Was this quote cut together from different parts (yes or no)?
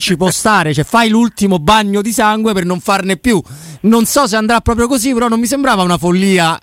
no